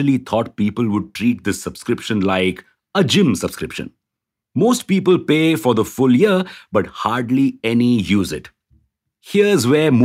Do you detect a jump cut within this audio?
no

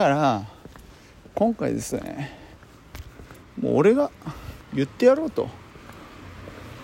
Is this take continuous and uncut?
no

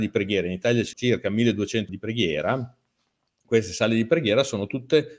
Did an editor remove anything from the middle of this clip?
yes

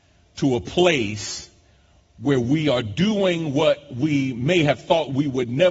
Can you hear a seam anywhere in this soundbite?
no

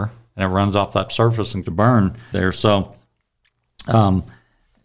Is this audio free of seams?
no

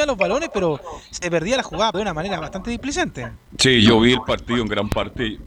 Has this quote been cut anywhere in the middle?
yes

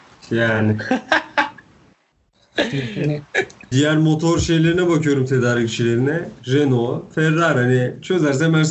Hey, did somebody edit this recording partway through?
yes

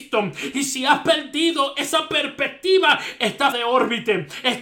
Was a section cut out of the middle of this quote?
yes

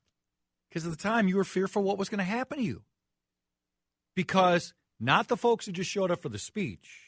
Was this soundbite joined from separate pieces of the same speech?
no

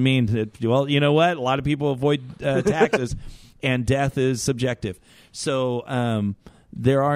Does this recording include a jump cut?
no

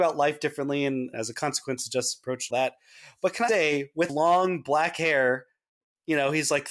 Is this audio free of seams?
no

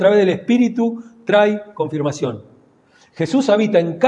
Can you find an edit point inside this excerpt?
no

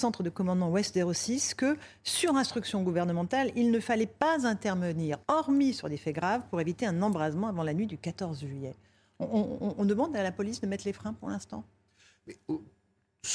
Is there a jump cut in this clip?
yes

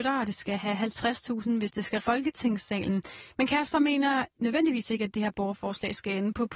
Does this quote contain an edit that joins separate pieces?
yes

